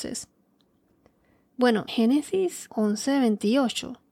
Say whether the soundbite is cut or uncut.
cut